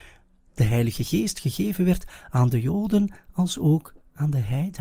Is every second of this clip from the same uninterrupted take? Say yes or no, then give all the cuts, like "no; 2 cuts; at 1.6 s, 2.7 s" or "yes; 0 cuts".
yes; 0 cuts